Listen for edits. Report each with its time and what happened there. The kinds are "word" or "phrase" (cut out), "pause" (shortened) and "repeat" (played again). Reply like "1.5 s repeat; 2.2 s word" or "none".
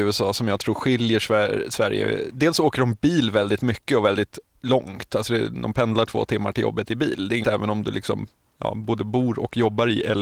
7.4 s word